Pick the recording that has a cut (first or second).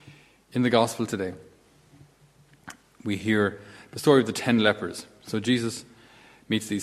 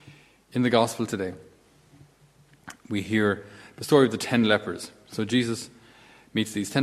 second